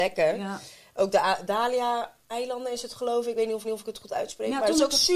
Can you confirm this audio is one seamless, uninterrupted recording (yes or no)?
no